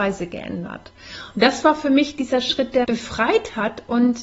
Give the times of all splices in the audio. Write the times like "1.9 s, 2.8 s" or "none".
2.8 s